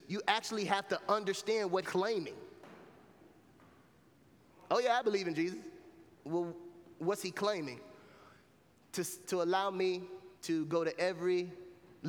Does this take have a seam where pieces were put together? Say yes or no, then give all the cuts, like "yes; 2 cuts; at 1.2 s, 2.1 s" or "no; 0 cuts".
yes; 4 cuts; at 1.8 s, 6.1 s, 9.2 s, 10.4 s